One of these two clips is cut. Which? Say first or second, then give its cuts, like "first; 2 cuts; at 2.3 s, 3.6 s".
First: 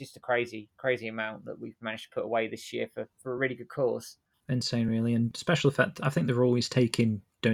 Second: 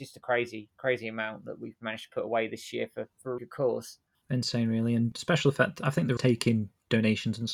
second; 2 cuts; at 3.4 s, 6.2 s